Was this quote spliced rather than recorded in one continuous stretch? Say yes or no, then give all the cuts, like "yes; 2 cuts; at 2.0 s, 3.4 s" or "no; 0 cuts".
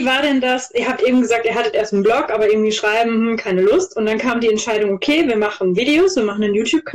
no; 0 cuts